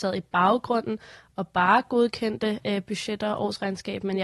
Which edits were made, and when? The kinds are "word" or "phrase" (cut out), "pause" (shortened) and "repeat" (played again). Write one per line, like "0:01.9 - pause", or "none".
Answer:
none